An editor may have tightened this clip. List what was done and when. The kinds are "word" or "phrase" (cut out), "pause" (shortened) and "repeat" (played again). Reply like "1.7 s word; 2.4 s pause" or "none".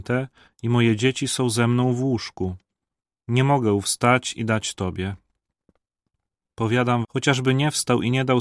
7.0 s word